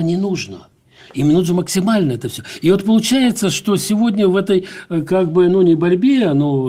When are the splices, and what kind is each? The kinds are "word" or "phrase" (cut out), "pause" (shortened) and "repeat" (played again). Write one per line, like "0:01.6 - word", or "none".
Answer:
none